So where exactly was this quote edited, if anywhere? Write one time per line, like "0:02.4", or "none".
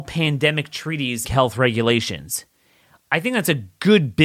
0:01.2